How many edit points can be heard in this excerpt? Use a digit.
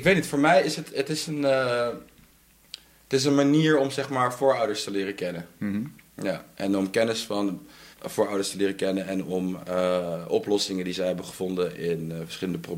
1